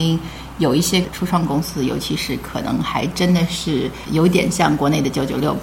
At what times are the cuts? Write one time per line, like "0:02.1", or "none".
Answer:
0:04.1